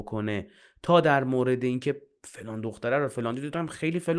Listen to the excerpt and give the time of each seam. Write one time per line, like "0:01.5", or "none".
none